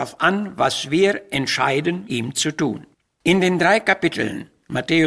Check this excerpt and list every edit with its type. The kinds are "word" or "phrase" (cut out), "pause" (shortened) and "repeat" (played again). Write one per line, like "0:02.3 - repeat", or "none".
0:02.1 - word
0:02.9 - pause